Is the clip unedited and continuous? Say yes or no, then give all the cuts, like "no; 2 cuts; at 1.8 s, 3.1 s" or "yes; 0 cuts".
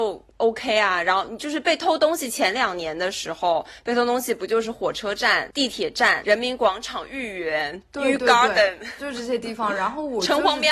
yes; 0 cuts